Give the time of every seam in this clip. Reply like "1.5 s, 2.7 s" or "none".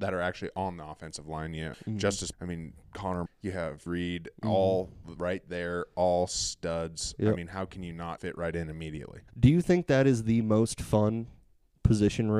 1.7 s, 2.3 s, 3.3 s, 3.9 s, 8.2 s, 9.3 s